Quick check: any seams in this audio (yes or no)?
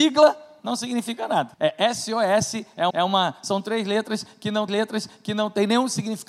yes